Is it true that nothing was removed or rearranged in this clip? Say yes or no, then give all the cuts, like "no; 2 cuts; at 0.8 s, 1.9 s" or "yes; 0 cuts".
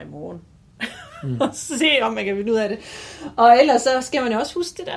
yes; 0 cuts